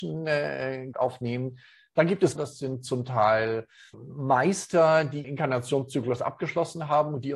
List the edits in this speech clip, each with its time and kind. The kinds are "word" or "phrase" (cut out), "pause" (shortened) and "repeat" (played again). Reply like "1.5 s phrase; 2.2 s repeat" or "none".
0.9 s word; 2.4 s word; 3.9 s word; 5.2 s word